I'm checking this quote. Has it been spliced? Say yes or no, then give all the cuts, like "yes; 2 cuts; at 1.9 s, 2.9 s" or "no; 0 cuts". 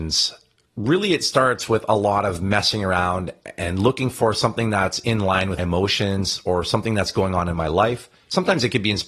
yes; 1 cut; at 5.6 s